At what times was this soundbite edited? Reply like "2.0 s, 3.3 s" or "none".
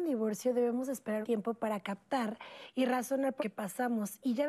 1.2 s, 3.4 s